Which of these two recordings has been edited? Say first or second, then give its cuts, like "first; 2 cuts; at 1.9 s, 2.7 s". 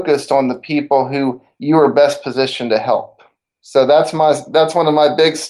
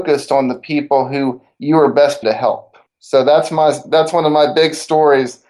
second; 2 cuts; at 2.2 s, 2.9 s